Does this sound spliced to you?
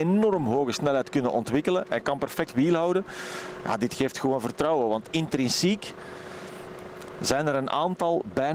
yes; 1 cut; at 2.5 s

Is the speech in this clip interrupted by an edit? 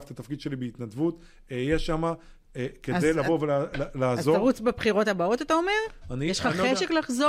no; 0 cuts

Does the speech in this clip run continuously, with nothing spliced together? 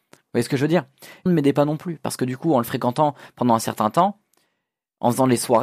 no; 1 cut; at 1.3 s

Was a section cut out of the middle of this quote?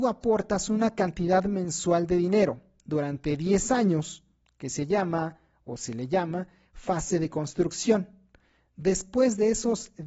no; 0 cuts

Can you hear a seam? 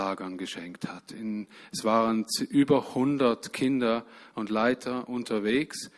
no; 0 cuts

